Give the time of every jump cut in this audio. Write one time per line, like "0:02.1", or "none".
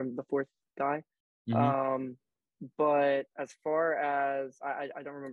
none